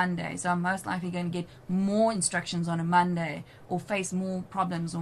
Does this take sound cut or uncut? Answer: uncut